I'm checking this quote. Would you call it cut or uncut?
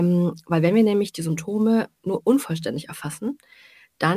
uncut